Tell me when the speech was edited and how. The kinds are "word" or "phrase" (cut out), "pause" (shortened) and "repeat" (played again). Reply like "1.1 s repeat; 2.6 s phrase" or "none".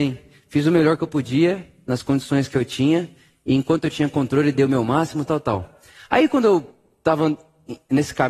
5.3 s word

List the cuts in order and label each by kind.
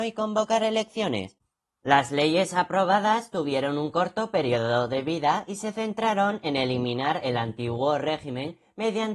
none

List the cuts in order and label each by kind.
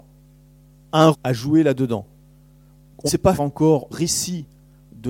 1.1 s word; 3.1 s word; 3.4 s word; 3.9 s word

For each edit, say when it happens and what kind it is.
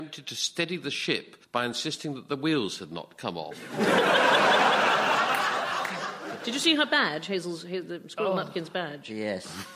1.4 s pause

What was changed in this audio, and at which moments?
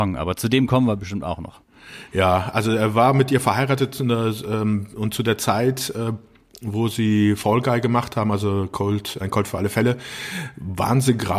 9.2 s word

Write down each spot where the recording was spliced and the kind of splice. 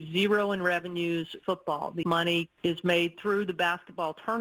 1.4 s phrase; 2.0 s word; 2.6 s pause

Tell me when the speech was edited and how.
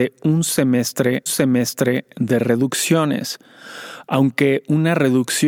1.3 s repeat

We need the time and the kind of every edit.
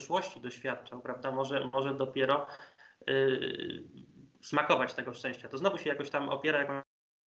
2.8 s pause

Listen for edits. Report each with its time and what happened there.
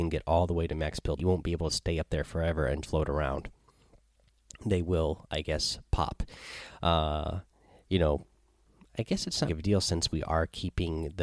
1.2 s phrase; 2.8 s word; 9.5 s phrase

